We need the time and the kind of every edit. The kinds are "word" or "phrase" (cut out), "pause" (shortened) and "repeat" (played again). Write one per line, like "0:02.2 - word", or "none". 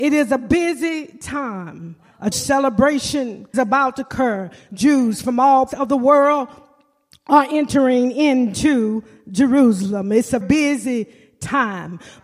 0:02.3 - word
0:03.5 - word
0:05.7 - word
0:10.4 - word